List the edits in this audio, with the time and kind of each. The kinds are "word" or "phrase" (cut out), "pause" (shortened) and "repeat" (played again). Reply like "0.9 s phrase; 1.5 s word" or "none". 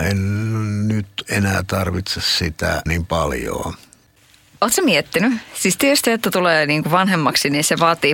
2.9 s word; 6.0 s word